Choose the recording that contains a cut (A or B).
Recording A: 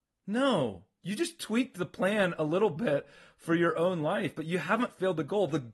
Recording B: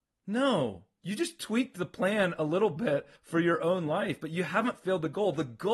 B